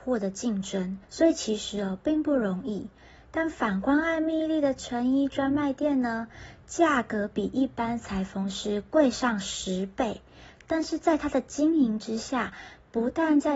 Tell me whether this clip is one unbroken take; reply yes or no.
no